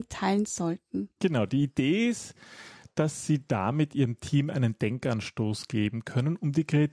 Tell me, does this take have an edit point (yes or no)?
no